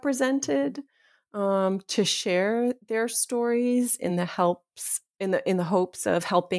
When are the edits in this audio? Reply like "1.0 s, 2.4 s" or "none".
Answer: none